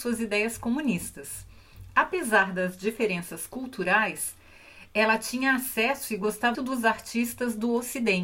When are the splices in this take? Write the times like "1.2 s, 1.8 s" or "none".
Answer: 6.5 s